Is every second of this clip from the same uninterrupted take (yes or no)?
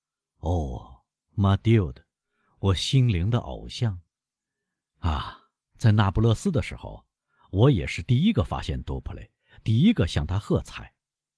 yes